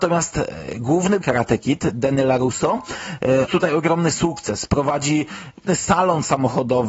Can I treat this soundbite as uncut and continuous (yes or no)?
no